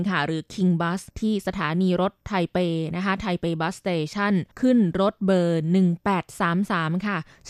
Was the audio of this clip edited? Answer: yes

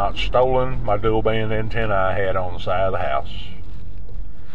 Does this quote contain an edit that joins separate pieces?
no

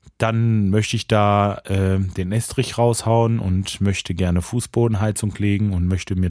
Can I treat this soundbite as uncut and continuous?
yes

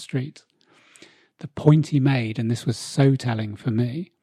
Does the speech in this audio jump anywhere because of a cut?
no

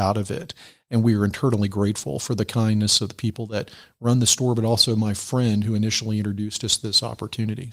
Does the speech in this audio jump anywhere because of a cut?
no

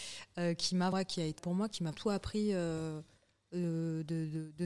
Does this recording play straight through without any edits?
no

